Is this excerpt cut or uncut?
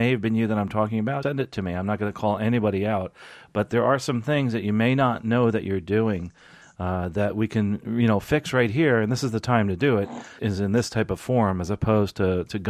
cut